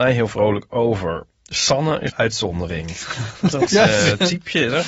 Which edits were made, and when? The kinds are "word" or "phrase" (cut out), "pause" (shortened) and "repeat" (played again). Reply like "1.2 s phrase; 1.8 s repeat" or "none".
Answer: 1.3 s pause; 2.1 s phrase; 3.7 s word